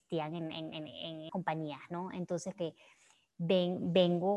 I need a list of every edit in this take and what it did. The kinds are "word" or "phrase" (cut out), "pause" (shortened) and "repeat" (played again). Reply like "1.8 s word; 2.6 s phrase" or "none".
1.3 s word; 2.5 s word